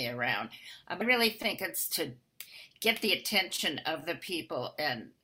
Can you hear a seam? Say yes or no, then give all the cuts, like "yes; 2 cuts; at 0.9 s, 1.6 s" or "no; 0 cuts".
yes; 1 cut; at 1.0 s